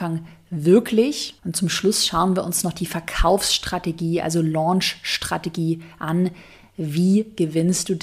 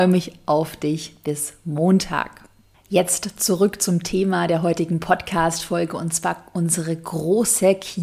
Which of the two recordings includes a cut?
first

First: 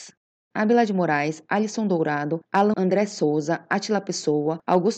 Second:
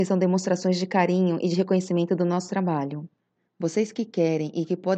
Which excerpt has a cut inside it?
first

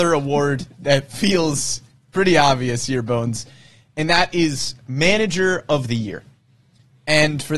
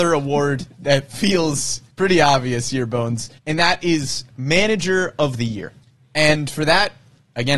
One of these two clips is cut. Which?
second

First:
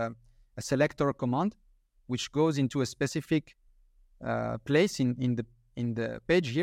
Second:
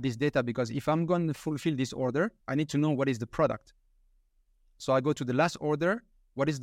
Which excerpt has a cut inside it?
second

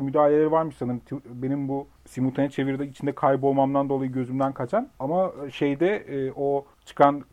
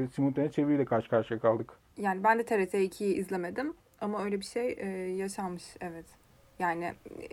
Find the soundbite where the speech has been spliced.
first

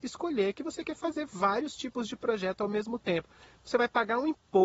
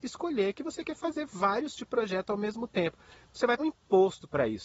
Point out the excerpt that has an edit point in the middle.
second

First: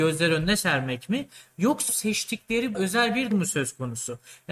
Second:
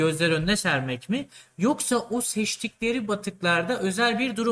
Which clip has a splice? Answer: first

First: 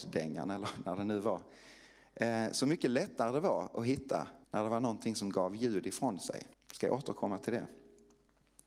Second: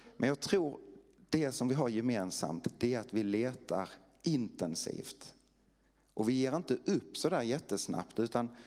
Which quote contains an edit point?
first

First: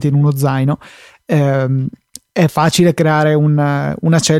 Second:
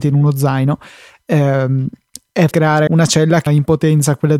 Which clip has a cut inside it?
second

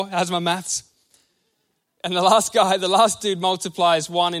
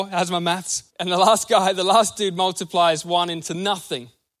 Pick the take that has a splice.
second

